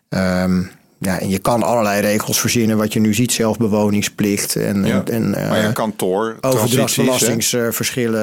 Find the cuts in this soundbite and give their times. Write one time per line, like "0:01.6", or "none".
none